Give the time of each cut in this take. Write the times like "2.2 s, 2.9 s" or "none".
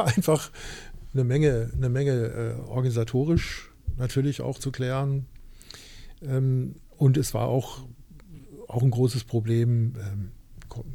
4.6 s

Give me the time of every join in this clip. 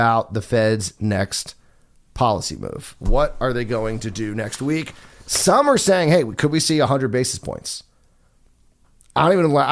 none

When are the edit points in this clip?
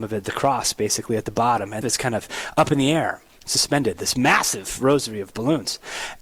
1.8 s

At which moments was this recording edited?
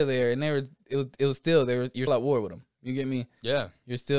2.1 s

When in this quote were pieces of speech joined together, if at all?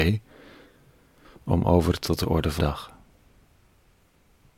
2.0 s, 2.6 s

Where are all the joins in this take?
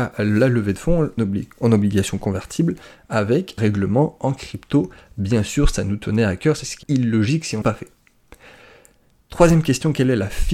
1.2 s, 3.6 s, 6.8 s, 7.6 s

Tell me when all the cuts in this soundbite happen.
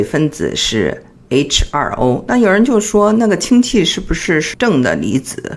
none

